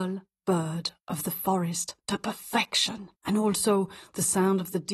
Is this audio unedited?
no; 1 cut; at 3.2 s

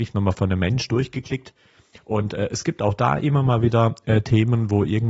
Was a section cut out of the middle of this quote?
no; 0 cuts

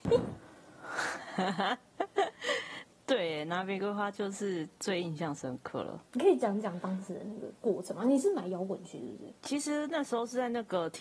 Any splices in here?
yes; 2 cuts; at 6.1 s, 9.4 s

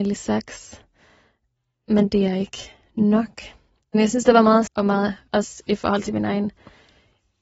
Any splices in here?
yes; 2 cuts; at 4.7 s, 5.3 s

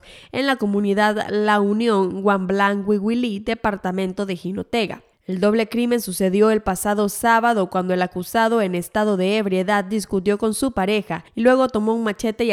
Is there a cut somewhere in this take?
yes; 2 cuts; at 5.1 s, 11.3 s

